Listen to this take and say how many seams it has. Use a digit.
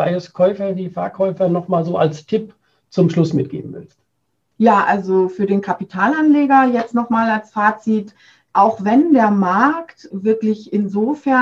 0